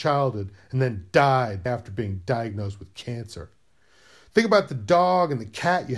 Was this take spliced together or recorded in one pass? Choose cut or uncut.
cut